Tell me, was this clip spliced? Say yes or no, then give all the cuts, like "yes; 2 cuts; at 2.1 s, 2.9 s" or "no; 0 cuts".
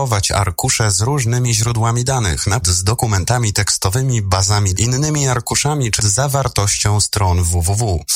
yes; 3 cuts; at 2.6 s, 4.8 s, 6.0 s